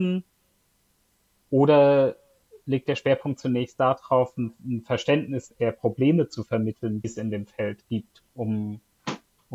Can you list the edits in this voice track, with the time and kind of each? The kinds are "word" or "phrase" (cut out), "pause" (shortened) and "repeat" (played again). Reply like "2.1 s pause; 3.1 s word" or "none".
5.5 s word; 7.0 s word; 8.3 s pause